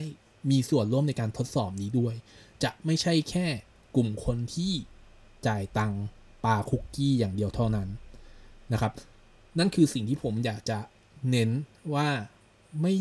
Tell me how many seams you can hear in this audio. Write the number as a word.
zero